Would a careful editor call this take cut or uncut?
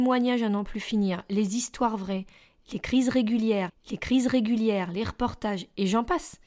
cut